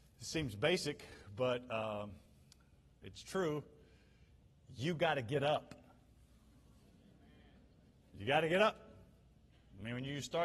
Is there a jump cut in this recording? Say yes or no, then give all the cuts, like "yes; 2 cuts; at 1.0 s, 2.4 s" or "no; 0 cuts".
no; 0 cuts